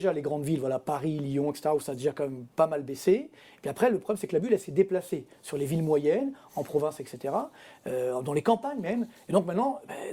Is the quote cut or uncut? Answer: uncut